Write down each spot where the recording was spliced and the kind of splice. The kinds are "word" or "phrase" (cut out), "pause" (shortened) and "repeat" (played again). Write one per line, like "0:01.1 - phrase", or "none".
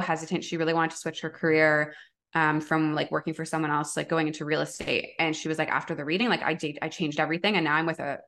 none